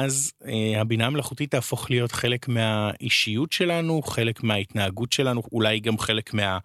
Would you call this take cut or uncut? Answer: uncut